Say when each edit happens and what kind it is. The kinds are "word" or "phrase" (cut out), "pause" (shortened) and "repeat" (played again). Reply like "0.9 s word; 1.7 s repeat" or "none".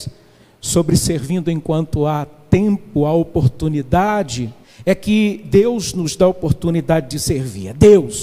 4.6 s pause

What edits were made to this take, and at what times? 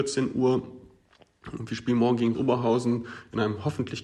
2.3 s word

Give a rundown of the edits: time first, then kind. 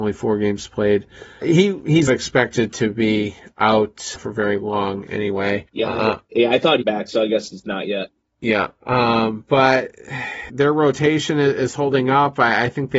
1.4 s word; 2.1 s word; 4.2 s word; 5.7 s pause; 6.8 s word; 8.8 s pause; 10.5 s word

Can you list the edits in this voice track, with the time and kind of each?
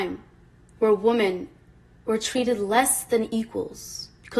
none

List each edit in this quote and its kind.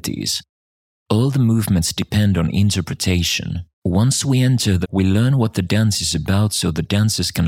3.7 s pause; 4.8 s word

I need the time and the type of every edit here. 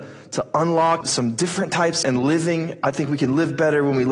1.0 s word; 2.0 s phrase

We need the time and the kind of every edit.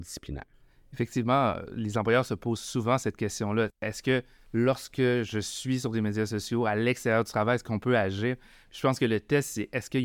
none

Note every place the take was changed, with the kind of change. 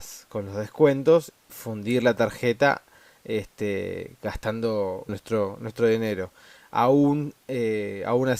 1.5 s word; 5.1 s word

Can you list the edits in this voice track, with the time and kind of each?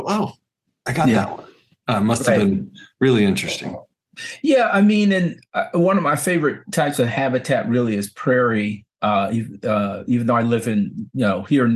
none

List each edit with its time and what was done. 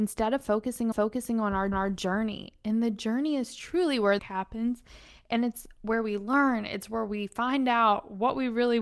0.9 s repeat; 1.7 s repeat; 4.2 s phrase

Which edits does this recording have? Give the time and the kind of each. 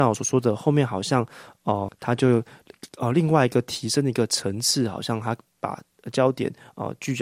1.9 s word

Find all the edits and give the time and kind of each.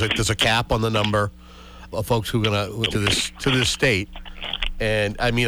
1.9 s word; 2.9 s word

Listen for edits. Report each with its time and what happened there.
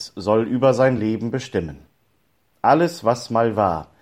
none

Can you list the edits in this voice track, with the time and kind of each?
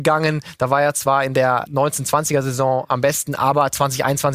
1.7 s word

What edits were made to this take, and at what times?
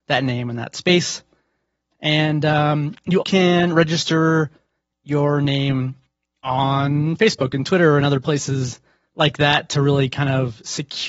3.2 s word

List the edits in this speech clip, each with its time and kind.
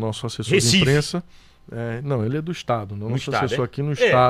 none

